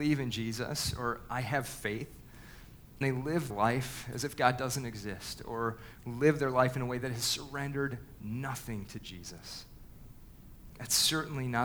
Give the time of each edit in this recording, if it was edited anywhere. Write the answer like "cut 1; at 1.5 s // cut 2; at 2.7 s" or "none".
cut 1; at 3.0 s // cut 2; at 3.5 s